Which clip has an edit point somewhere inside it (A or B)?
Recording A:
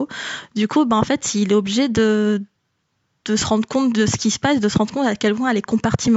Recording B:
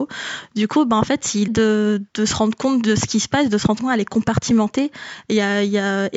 B